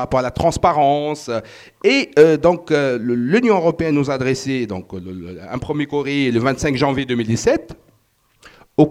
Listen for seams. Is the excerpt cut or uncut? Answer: uncut